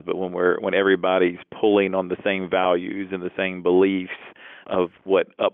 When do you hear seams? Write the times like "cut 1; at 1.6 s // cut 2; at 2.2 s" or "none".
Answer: none